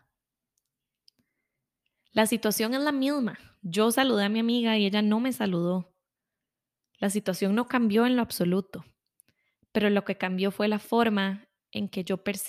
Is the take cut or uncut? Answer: uncut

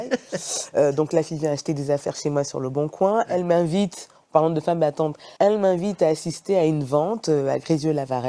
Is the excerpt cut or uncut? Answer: cut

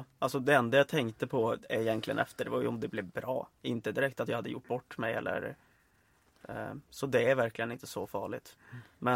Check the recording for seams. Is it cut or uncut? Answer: uncut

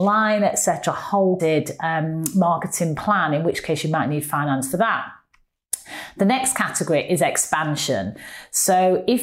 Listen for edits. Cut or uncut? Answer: cut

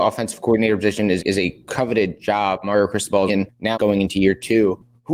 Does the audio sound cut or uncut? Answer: cut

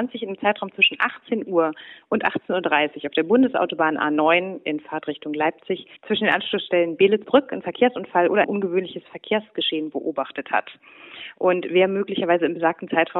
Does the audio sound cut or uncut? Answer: cut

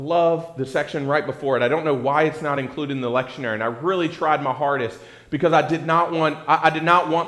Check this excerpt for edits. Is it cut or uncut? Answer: uncut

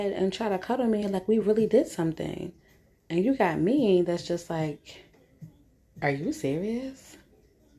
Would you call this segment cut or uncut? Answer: uncut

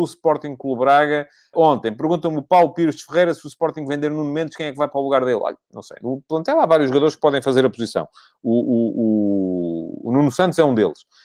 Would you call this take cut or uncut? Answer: cut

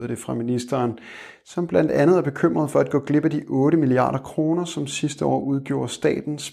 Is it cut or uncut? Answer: uncut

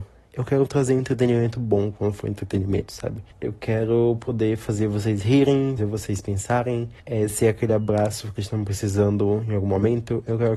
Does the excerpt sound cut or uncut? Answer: cut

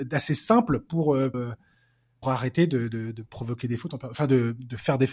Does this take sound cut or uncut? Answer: cut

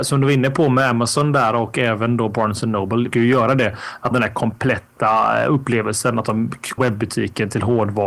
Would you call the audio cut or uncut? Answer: cut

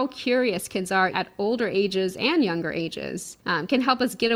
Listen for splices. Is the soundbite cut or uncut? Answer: cut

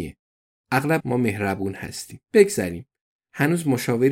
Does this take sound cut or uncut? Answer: cut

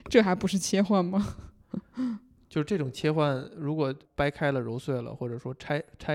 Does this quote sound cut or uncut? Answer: cut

